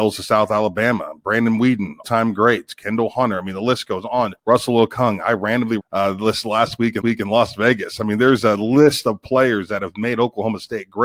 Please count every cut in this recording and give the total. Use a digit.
4